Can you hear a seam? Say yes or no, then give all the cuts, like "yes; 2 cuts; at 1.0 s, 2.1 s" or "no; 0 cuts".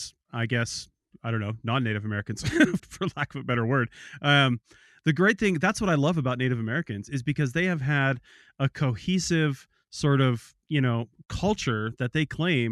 yes; 2 cuts; at 1.1 s, 2.8 s